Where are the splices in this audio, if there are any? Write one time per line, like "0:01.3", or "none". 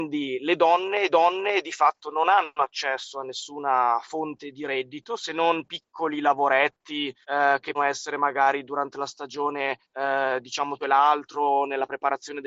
0:01.1
0:07.2
0:07.7
0:09.8
0:10.8